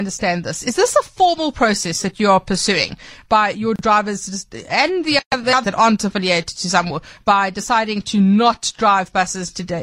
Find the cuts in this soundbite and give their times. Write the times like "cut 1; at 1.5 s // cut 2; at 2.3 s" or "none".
cut 1; at 5.6 s